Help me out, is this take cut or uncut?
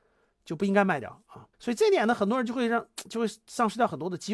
cut